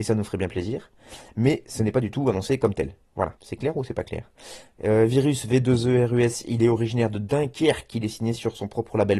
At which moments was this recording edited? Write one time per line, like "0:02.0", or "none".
0:03.4